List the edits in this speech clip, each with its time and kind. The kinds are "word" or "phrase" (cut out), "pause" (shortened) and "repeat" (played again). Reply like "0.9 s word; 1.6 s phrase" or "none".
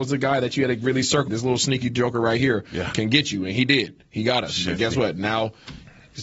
1.3 s phrase